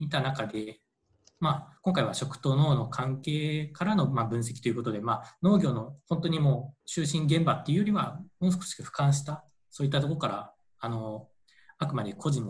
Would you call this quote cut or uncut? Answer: cut